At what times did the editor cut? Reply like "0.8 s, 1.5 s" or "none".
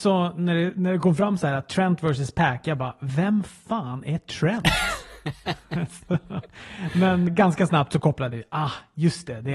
7.3 s